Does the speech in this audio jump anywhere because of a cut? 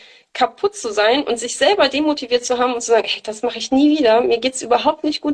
no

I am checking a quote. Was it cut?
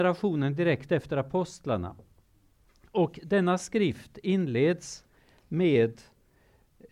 no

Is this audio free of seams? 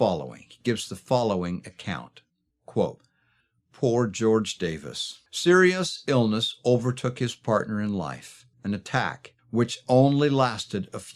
no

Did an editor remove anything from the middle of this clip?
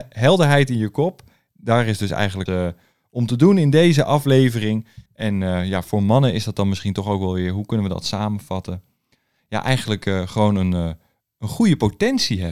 yes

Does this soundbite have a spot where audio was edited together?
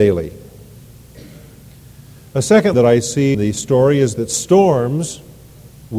yes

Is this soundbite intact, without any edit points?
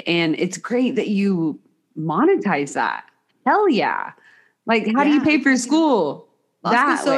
yes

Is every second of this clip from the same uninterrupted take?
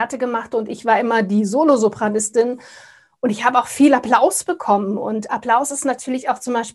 yes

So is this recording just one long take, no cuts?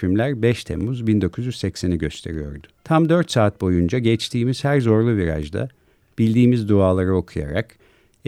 no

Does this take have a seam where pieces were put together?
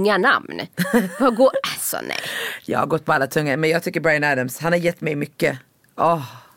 no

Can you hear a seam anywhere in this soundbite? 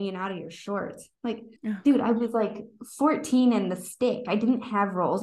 yes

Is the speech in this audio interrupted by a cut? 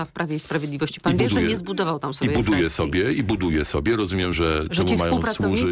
no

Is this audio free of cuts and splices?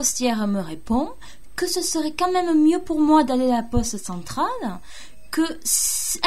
yes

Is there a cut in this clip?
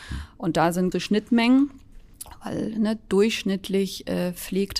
yes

